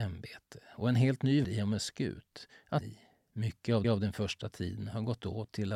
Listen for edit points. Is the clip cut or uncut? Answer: cut